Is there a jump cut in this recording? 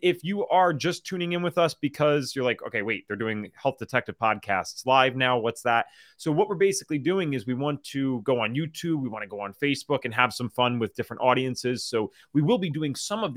no; 0 cuts

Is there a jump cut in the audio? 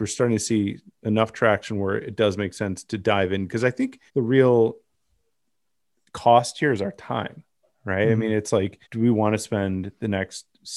yes; 2 cuts; at 4.1 s, 8.8 s

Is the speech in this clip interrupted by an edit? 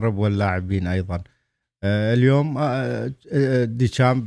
no; 0 cuts

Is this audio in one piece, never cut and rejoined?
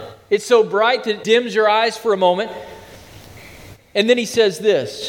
no; 1 cut; at 1.2 s

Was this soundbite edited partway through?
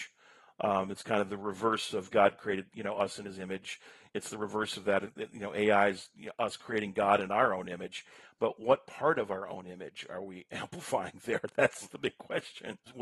no; 0 cuts

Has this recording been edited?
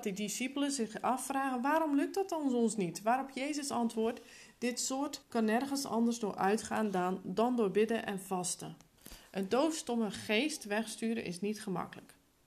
yes; 1 cut; at 5.2 s

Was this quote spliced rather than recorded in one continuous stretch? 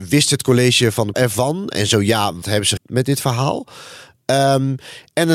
yes; 3 cuts; at 1.1 s, 2.4 s, 2.8 s

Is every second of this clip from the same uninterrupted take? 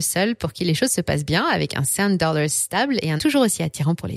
no; 1 cut; at 3.2 s

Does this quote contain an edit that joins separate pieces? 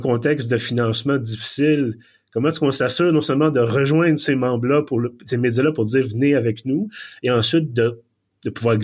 no; 0 cuts

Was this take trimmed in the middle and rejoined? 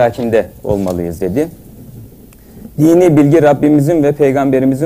no; 0 cuts

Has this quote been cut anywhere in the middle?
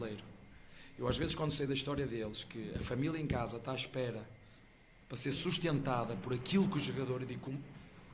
no; 0 cuts

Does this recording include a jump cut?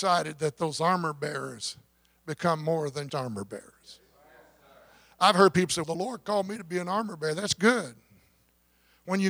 yes; 2 cuts; at 3.1 s, 5.8 s

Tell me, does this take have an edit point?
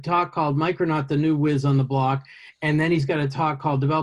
no; 0 cuts

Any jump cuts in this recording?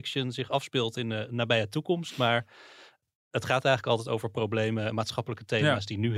no; 0 cuts

